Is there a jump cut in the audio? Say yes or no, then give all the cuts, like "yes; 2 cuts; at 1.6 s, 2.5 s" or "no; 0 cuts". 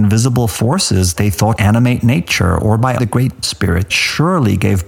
yes; 5 cuts; at 1.2 s, 1.6 s, 3.0 s, 3.4 s, 3.9 s